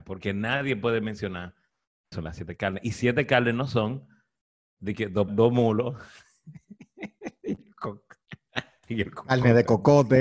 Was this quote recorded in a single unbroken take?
no; 2 cuts; at 2.1 s, 5.3 s

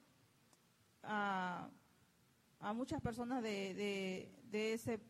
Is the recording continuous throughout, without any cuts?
yes; 0 cuts

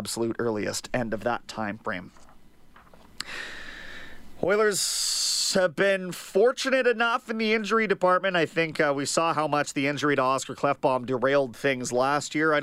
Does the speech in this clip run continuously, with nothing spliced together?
yes; 0 cuts

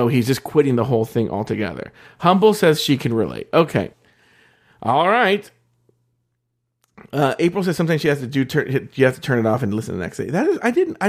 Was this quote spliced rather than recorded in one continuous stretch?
yes; 1 cut; at 3.9 s

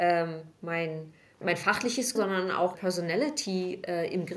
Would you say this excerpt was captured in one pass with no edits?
no; 3 cuts; at 1.4 s, 2.2 s, 2.8 s

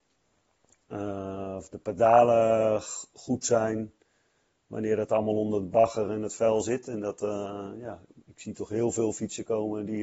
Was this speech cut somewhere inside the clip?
no; 0 cuts

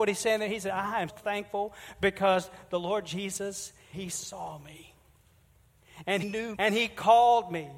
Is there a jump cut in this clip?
yes; 4 cuts; at 1.1 s, 3.9 s, 6.2 s, 6.5 s

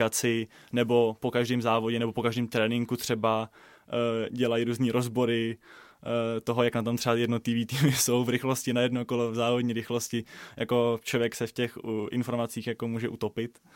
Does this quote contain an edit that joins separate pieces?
no; 0 cuts

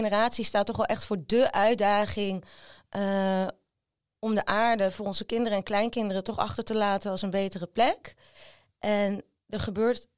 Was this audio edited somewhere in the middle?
no; 0 cuts

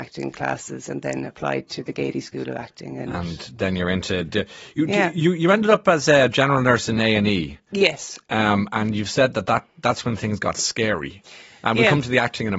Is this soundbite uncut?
yes; 0 cuts

